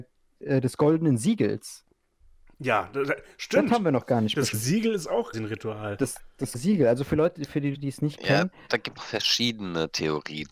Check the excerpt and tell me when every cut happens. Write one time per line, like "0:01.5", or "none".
0:04.5
0:05.3
0:06.5
0:07.7
0:09.0